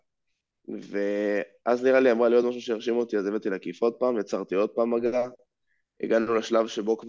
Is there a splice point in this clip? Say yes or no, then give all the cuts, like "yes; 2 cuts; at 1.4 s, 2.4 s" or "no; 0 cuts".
no; 0 cuts